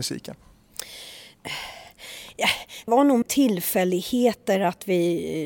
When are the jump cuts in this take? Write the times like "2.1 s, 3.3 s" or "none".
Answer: 2.9 s, 3.2 s